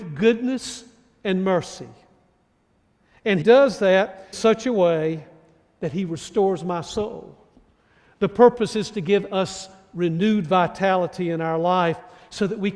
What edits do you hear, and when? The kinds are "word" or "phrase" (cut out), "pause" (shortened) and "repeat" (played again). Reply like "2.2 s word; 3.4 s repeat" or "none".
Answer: 3.4 s word; 4.3 s word